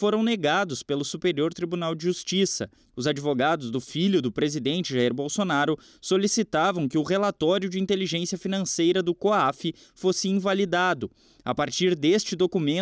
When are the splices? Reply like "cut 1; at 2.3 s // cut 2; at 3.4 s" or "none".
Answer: none